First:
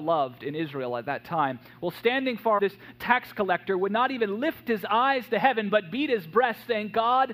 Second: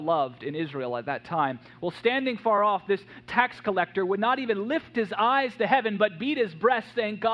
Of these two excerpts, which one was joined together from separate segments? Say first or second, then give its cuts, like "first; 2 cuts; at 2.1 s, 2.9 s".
first; 1 cut; at 2.6 s